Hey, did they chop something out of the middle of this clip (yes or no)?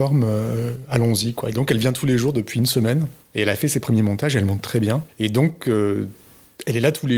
no